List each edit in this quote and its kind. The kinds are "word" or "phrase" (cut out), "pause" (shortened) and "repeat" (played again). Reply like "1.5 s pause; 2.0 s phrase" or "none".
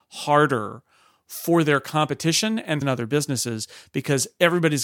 2.8 s phrase